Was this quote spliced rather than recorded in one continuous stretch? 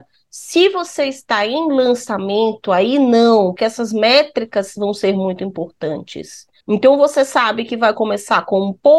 yes; 2 cuts; at 3.6 s, 6.6 s

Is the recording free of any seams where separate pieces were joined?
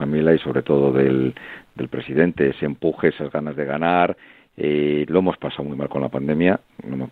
yes; 0 cuts

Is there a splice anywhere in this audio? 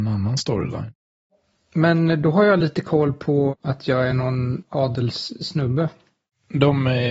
no; 0 cuts

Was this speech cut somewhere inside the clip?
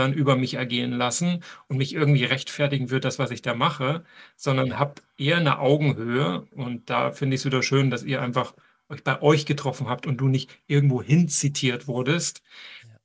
no; 0 cuts

